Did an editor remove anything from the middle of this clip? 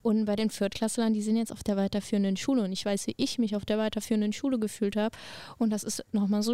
no; 0 cuts

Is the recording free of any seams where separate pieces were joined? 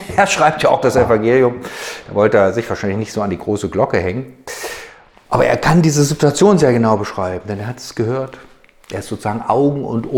yes; 0 cuts

